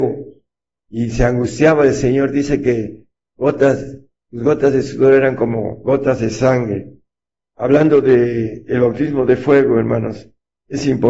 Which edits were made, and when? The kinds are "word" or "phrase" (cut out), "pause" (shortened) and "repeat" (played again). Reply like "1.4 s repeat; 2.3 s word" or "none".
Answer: none